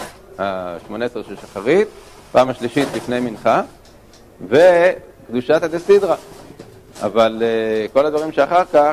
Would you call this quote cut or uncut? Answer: uncut